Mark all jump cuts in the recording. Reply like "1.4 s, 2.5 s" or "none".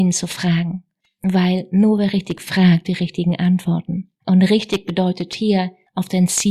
2.8 s, 4.2 s